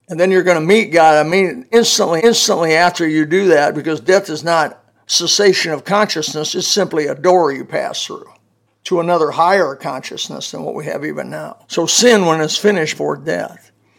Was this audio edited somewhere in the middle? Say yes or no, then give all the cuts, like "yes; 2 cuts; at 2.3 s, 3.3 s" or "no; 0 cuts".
yes; 4 cuts; at 2.2 s, 8.7 s, 11.6 s, 12.9 s